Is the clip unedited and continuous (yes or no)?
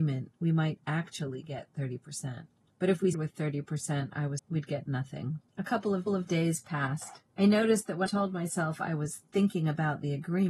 no